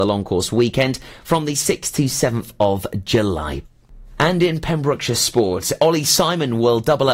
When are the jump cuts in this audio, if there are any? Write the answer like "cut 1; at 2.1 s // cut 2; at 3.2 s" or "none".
none